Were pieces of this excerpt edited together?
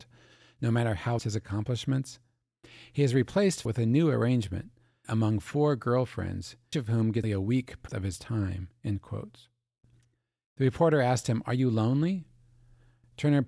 yes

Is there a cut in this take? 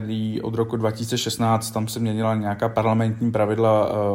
no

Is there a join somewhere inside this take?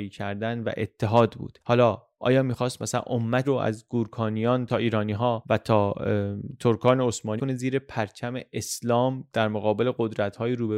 yes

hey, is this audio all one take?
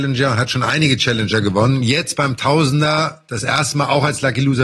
yes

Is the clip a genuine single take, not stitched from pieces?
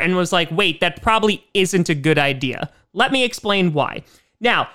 yes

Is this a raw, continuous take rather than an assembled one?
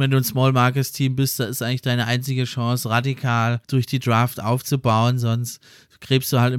no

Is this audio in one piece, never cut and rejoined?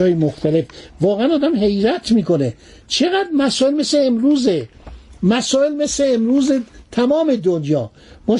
yes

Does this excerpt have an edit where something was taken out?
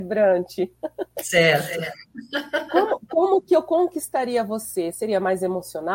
no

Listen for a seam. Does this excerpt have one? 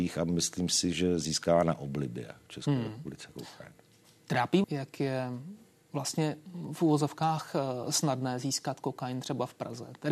yes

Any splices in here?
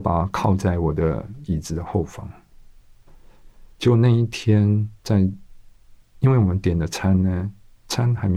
yes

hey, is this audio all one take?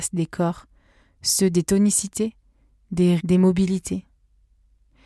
no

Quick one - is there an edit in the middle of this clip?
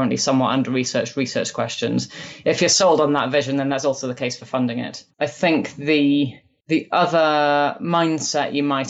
no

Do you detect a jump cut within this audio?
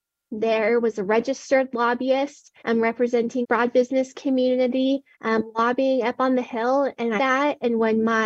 yes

